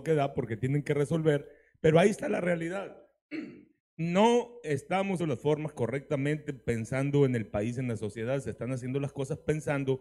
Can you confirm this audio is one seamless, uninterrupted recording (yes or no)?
no